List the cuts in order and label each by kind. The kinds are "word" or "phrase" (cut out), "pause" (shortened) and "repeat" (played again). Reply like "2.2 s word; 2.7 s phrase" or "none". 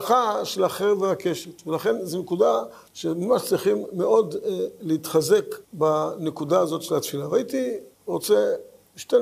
2.9 s pause; 5.6 s pause; 7.9 s pause